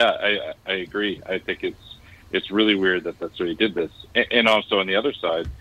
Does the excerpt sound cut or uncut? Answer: uncut